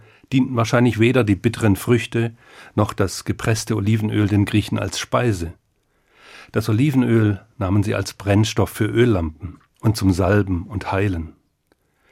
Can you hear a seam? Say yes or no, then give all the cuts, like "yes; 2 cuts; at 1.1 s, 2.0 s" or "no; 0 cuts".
no; 0 cuts